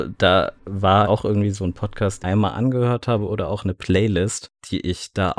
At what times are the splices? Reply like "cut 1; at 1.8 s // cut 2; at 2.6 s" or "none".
cut 1; at 1.0 s // cut 2; at 2.2 s

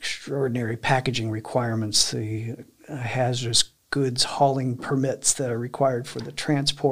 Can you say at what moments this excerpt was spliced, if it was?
none

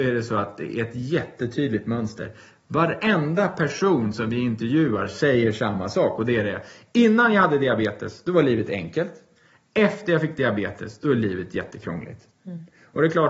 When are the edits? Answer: none

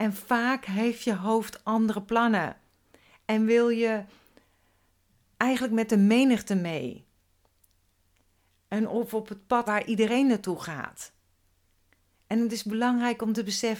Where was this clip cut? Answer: cut 1; at 9.7 s

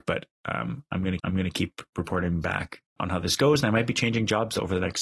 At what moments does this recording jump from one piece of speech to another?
cut 1; at 1.2 s // cut 2; at 3.0 s

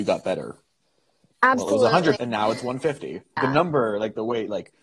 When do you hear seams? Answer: cut 1; at 2.2 s // cut 2; at 3.4 s

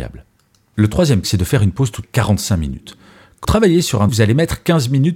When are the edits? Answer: cut 1; at 1.2 s // cut 2; at 2.0 s // cut 3; at 3.4 s // cut 4; at 4.1 s

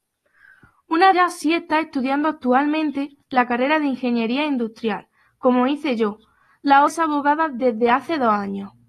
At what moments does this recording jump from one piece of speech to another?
cut 1; at 1.1 s // cut 2; at 6.9 s

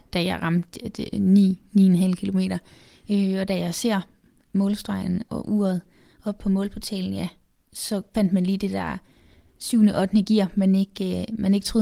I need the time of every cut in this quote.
none

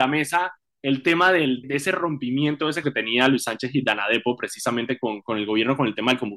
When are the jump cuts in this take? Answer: cut 1; at 1.6 s // cut 2; at 2.8 s // cut 3; at 5.2 s

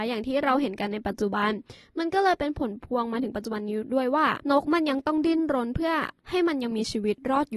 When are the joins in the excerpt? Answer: cut 1; at 4.4 s // cut 2; at 6.2 s

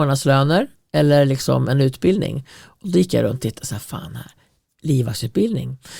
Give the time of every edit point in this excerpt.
none

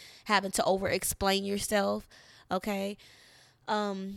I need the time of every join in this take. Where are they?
none

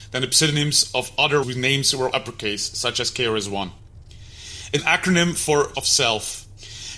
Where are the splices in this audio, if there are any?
cut 1; at 1.4 s // cut 2; at 2.1 s // cut 3; at 4.8 s // cut 4; at 5.7 s

